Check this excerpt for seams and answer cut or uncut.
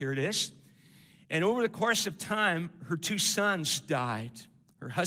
uncut